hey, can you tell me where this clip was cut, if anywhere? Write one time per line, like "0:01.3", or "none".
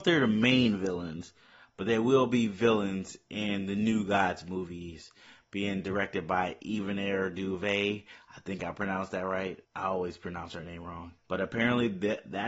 0:09.6
0:11.2

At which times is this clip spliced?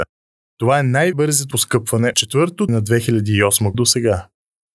0:01.5
0:02.1
0:02.7
0:03.7

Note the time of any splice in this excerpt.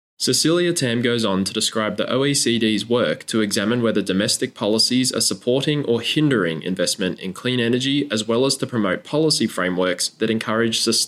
none

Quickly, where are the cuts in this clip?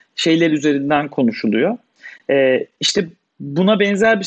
none

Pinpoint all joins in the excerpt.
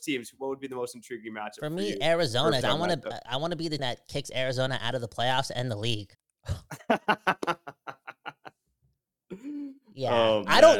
0:02.6
0:03.8
0:06.1

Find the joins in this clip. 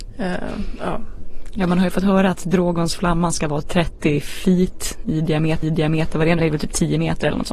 0:03.6
0:05.6
0:06.4

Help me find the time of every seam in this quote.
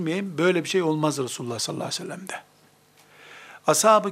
none

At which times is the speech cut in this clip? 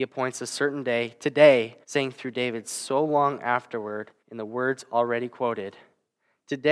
0:01.8
0:04.2

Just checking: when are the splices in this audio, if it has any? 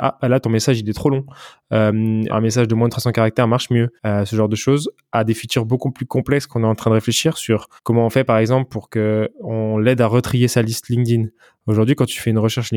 0:02.3
0:04.0
0:07.8

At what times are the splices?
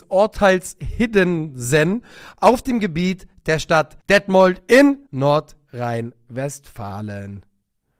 0:04.0
0:05.1

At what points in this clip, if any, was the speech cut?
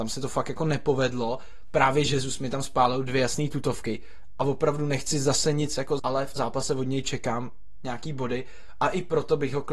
0:06.0
0:06.4

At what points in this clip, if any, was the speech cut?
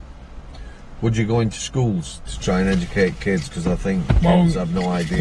none

